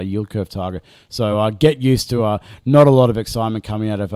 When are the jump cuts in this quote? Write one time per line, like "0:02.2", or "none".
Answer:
none